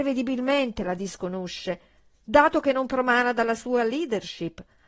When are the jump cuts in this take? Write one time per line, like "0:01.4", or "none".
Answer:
none